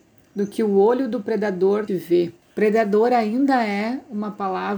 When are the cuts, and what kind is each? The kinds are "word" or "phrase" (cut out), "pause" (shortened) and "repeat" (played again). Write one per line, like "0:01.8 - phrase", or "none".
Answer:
0:01.9 - word
0:02.4 - pause